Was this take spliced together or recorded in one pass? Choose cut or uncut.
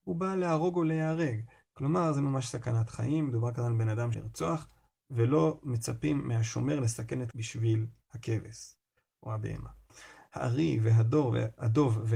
cut